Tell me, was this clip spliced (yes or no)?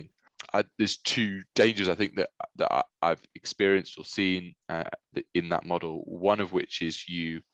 yes